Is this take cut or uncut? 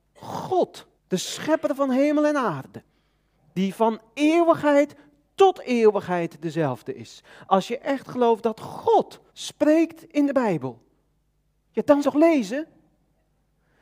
cut